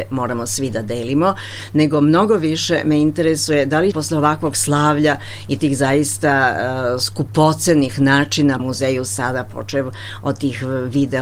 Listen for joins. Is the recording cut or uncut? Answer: cut